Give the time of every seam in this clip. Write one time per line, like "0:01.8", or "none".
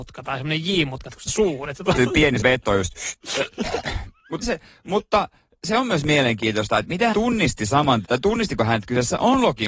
0:01.3
0:02.0
0:02.4
0:04.4
0:07.1
0:08.0